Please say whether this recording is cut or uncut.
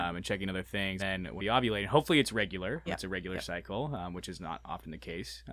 cut